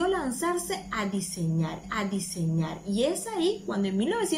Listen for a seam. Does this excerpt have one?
yes; 1 cut; at 1.8 s

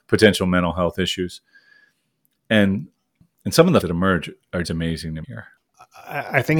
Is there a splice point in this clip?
yes; 3 cuts; at 3.8 s, 4.6 s, 5.2 s

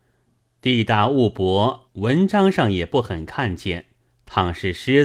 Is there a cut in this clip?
yes; 2 cuts; at 1.9 s, 4.0 s

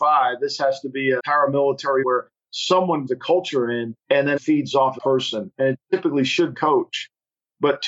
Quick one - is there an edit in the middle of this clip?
yes; 7 cuts; at 1.2 s, 2.0 s, 3.1 s, 4.0 s, 4.4 s, 5.0 s, 6.5 s

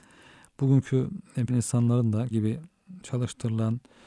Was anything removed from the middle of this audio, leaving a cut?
yes; 2 cuts; at 1.5 s, 2.3 s

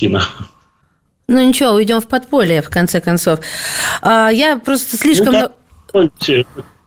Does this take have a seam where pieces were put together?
no; 0 cuts

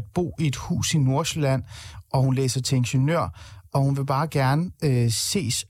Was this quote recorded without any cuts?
yes; 0 cuts

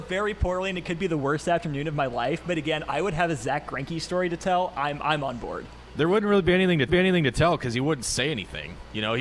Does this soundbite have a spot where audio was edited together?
yes; 1 cut; at 6.9 s

